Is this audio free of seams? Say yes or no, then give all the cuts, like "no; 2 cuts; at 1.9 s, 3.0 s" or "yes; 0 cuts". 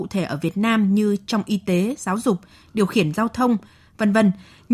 yes; 0 cuts